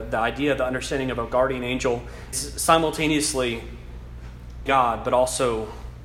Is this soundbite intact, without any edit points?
no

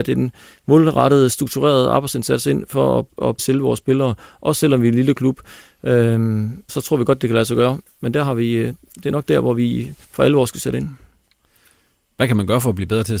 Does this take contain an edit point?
yes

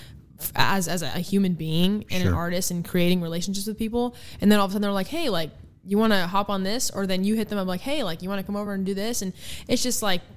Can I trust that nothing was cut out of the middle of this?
yes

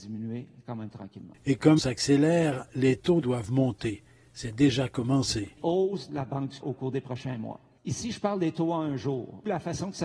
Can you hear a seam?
yes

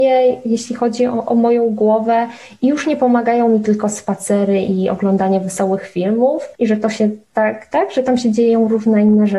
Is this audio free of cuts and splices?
no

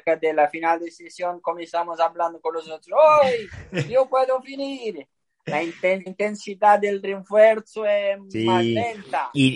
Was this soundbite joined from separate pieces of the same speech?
yes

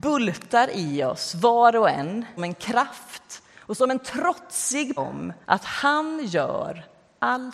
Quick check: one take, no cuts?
no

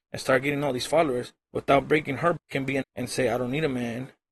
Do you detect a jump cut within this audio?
yes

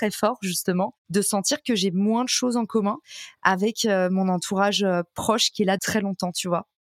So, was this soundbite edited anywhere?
yes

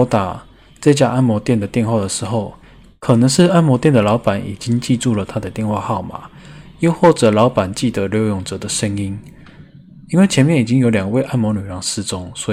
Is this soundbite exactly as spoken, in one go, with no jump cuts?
yes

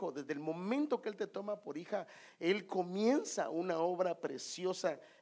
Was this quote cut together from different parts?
no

